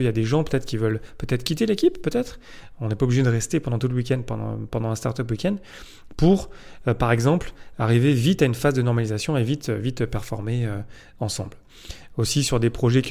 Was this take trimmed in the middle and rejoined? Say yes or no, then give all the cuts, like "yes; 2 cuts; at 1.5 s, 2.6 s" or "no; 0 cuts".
no; 0 cuts